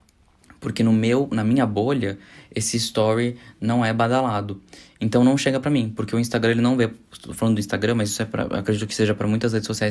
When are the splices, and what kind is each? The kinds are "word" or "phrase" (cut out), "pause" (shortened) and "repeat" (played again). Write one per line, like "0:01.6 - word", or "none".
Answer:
none